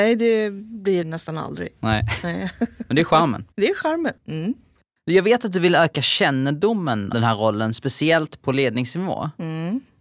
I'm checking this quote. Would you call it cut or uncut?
cut